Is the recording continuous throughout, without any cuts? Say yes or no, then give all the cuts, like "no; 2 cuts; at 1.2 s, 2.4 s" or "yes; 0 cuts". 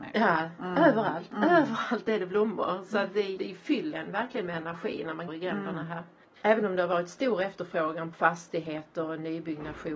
no; 4 cuts; at 3.4 s, 3.9 s, 5.3 s, 8.1 s